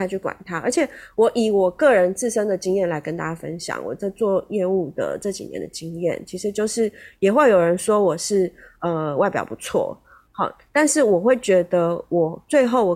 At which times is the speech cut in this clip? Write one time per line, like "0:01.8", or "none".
none